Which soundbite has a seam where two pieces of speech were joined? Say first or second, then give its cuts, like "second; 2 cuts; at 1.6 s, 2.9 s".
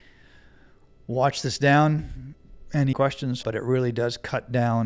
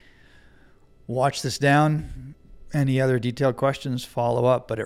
first; 2 cuts; at 2.9 s, 3.4 s